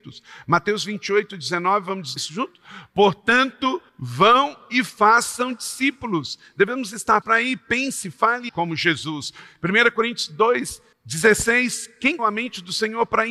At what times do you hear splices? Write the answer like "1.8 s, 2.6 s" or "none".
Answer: 2.2 s, 3.9 s, 7.2 s, 8.5 s, 10.9 s, 12.2 s